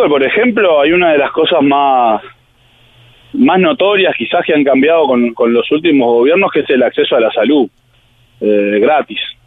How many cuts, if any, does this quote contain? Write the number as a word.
zero